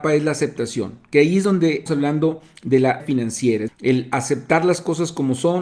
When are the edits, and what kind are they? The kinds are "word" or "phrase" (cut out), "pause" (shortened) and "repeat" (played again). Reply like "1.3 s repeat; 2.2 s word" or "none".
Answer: 1.9 s word; 3.0 s word; 3.7 s word